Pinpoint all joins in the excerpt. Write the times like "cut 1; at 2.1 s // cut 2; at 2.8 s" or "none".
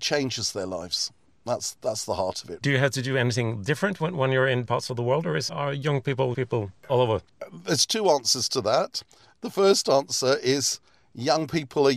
cut 1; at 2.6 s // cut 2; at 4.6 s // cut 3; at 5.5 s // cut 4; at 6.3 s

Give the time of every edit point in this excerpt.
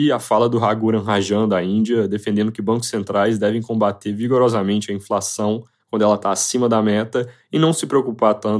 none

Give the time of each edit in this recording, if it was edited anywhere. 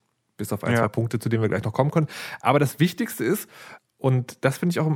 cut 1; at 3.8 s

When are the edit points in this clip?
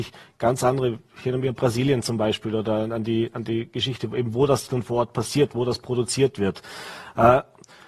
none

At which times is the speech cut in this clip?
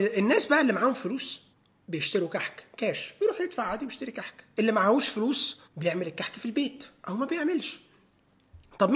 cut 1; at 1.5 s // cut 2; at 5.7 s

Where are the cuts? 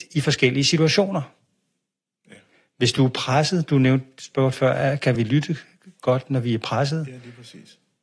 none

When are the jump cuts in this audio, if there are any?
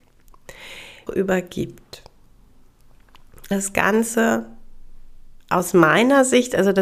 cut 1; at 1.1 s // cut 2; at 3.5 s // cut 3; at 5.4 s

